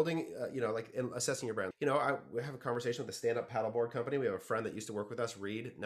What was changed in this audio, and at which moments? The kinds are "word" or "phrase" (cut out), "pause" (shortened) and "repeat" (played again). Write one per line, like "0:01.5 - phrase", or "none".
0:01.7 - word